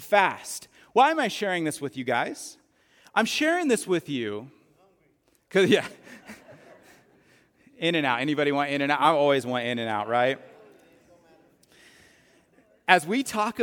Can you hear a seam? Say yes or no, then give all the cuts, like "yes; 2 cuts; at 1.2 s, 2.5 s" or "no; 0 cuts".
no; 0 cuts